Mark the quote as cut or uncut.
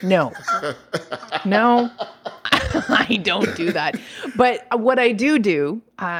uncut